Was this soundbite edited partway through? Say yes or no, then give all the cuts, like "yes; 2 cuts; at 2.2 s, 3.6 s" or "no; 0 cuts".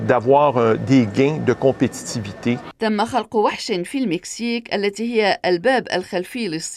no; 0 cuts